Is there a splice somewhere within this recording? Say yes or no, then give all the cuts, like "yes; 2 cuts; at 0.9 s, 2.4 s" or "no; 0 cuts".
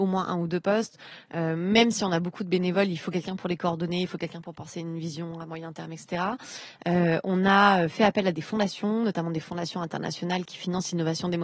no; 0 cuts